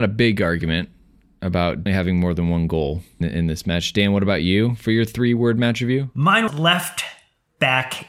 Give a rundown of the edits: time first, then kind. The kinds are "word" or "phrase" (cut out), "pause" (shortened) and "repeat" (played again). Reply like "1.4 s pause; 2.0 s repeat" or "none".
1.9 s word; 3.2 s word; 6.5 s word